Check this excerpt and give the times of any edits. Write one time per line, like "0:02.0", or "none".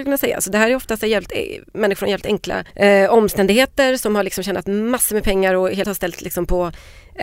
0:02.7
0:05.8